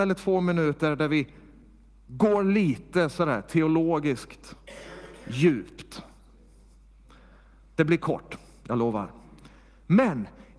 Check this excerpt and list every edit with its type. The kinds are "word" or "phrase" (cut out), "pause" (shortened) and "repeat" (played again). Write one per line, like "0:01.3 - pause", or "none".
none